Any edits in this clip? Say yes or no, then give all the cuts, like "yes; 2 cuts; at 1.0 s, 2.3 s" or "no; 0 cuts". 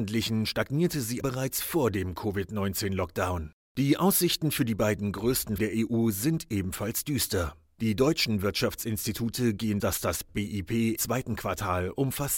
yes; 4 cuts; at 1.2 s, 5.6 s, 9.8 s, 11.0 s